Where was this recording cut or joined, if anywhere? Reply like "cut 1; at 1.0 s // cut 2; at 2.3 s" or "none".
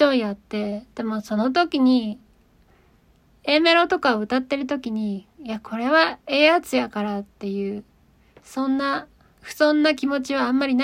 none